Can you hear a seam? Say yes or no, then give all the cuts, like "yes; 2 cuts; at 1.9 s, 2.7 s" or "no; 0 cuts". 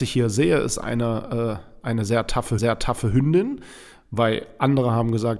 yes; 1 cut; at 2.6 s